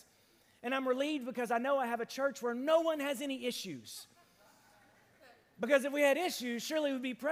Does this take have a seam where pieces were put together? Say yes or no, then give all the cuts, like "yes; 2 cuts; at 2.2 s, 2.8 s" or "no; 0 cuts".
no; 0 cuts